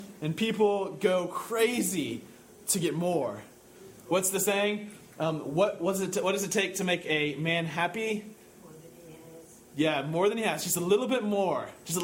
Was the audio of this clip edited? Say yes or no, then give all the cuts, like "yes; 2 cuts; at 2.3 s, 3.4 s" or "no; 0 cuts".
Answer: no; 0 cuts